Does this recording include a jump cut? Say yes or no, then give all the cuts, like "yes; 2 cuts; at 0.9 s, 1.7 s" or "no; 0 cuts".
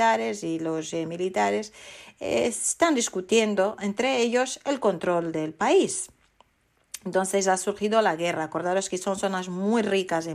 no; 0 cuts